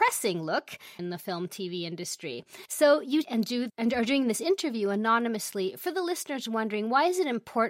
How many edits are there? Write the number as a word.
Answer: four